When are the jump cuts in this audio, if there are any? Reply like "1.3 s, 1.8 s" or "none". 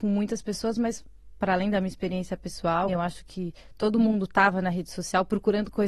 2.9 s